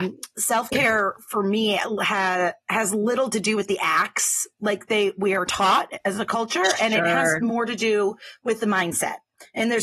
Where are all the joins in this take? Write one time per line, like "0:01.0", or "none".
0:02.6
0:04.5

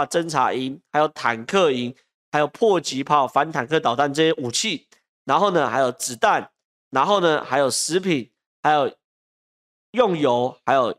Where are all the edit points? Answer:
none

